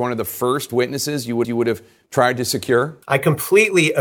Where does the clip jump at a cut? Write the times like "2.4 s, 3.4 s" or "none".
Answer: 1.4 s, 3.0 s